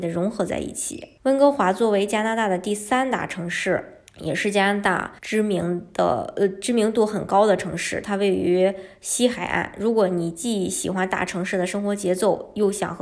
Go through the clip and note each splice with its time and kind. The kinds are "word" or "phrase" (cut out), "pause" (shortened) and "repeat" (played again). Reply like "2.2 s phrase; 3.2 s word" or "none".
1.2 s pause; 4.1 s pause; 5.2 s pause